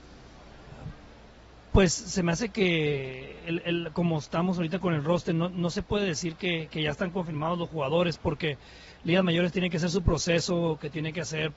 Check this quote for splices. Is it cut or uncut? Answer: uncut